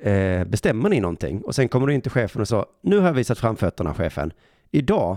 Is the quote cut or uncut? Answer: cut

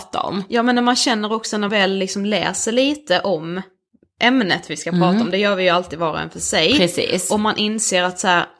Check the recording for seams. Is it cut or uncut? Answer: cut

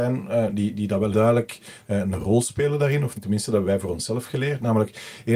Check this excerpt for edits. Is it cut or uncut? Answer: cut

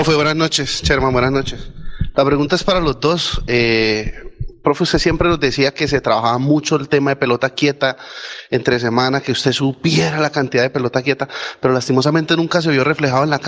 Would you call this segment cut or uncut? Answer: uncut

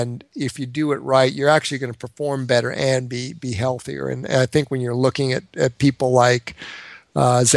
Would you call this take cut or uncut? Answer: uncut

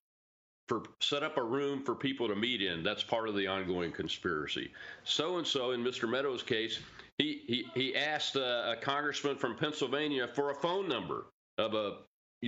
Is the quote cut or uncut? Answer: uncut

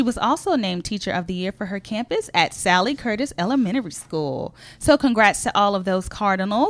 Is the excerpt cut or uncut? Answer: uncut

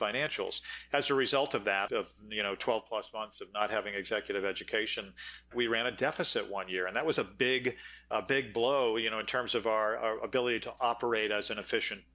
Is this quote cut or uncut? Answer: cut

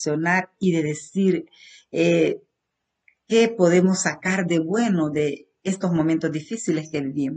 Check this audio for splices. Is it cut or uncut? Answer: uncut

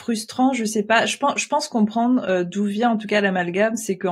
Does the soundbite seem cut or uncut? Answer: uncut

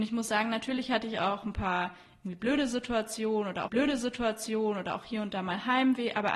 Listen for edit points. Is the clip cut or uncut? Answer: cut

